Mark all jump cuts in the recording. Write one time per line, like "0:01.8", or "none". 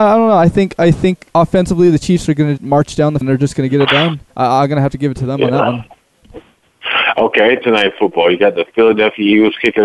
0:01.3
0:02.6
0:03.2
0:04.3
0:07.6